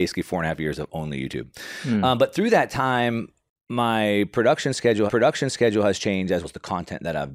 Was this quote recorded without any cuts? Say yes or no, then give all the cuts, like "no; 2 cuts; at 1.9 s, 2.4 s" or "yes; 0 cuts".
no; 2 cuts; at 5.1 s, 6.4 s